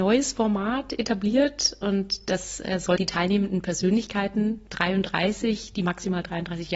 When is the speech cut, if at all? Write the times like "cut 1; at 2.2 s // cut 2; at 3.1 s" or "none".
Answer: cut 1; at 3.0 s